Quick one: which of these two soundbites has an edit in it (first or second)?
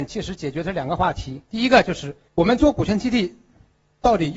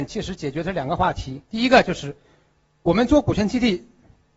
first